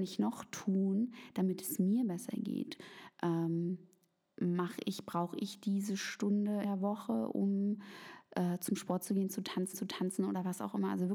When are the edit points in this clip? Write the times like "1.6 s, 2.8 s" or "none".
6.6 s, 9.7 s